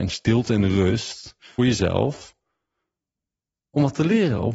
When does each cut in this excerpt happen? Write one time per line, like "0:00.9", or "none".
0:01.6